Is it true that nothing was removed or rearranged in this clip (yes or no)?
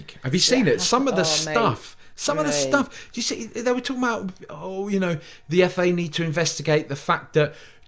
yes